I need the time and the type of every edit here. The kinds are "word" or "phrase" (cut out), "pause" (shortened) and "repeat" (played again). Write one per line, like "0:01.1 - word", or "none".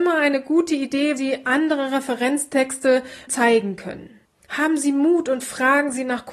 0:01.2 - word
0:03.3 - word
0:04.2 - pause